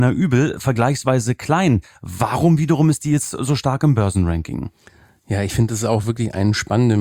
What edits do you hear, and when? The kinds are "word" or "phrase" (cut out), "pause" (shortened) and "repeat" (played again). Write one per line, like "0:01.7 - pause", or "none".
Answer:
none